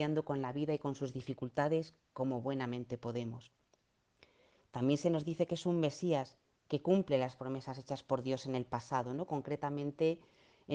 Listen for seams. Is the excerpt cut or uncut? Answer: uncut